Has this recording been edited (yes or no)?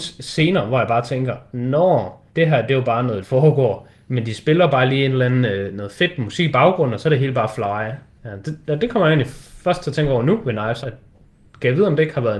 yes